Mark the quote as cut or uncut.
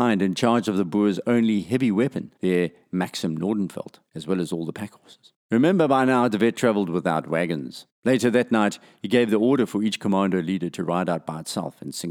cut